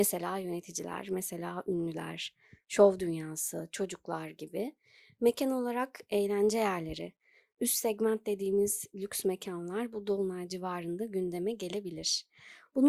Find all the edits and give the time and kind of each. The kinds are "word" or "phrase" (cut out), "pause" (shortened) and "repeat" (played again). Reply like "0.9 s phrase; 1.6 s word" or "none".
none